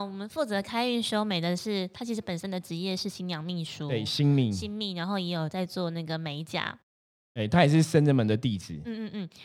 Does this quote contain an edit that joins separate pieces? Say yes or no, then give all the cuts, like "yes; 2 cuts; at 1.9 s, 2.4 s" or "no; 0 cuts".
no; 0 cuts